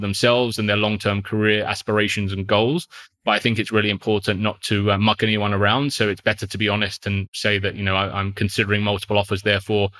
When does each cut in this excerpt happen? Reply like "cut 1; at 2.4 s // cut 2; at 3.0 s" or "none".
none